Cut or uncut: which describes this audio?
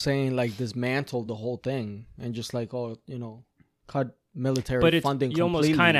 uncut